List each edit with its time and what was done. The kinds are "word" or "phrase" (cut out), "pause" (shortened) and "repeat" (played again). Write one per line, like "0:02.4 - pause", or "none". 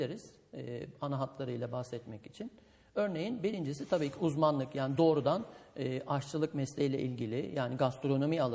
none